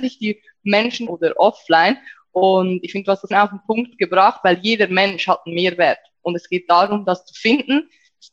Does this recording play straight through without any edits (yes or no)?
no